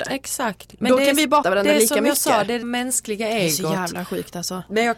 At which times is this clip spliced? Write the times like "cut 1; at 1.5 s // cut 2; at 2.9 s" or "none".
cut 1; at 1.4 s // cut 2; at 2.6 s